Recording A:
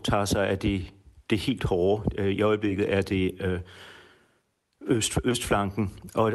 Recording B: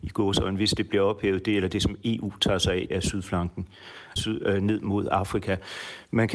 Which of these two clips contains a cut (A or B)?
B